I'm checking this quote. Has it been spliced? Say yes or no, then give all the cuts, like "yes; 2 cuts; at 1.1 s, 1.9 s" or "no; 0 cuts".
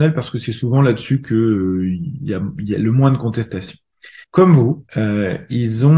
yes; 2 cuts; at 4.2 s, 4.9 s